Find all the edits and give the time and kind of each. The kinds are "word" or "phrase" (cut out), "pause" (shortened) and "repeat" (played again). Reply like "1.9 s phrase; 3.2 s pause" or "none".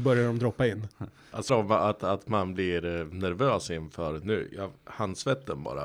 1.5 s phrase